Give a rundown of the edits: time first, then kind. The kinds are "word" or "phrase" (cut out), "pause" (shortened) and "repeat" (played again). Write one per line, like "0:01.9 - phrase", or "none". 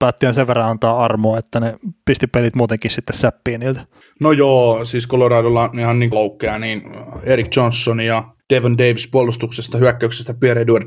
0:06.1 - word